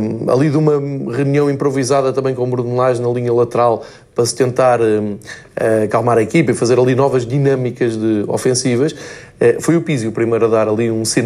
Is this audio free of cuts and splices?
yes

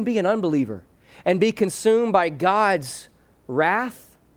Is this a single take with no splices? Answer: yes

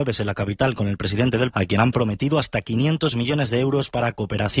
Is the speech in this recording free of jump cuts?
no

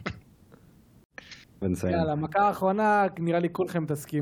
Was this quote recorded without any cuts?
no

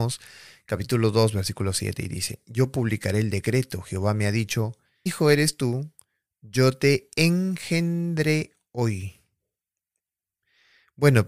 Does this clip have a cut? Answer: yes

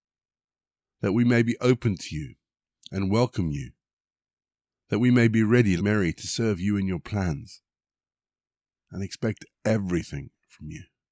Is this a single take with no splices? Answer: no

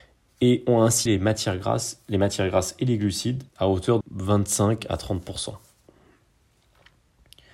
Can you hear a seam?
yes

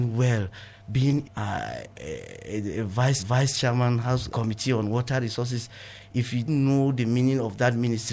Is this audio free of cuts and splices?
no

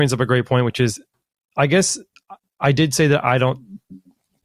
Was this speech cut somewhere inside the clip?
no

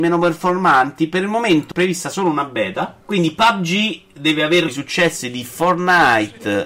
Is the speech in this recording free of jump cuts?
no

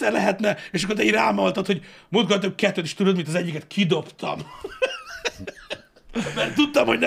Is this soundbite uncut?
yes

